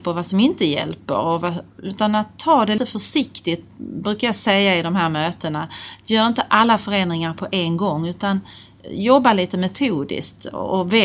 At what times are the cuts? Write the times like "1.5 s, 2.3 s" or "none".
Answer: 1.7 s, 2.8 s